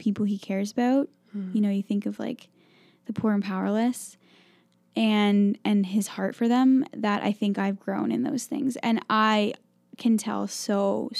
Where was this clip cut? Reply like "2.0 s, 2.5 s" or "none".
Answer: none